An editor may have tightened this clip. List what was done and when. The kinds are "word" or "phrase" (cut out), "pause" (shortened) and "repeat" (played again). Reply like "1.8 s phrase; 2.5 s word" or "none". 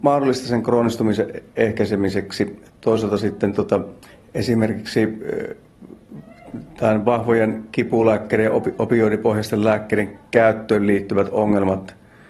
2.7 s pause; 4.0 s pause; 10.3 s pause